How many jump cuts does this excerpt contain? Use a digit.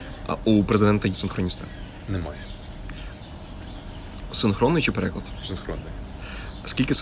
2